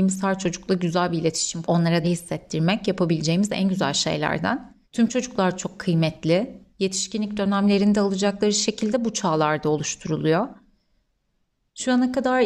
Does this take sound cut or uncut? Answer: cut